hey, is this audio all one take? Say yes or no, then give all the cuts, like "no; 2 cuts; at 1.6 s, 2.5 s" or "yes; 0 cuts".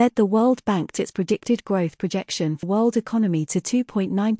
no; 2 cuts; at 1.0 s, 2.6 s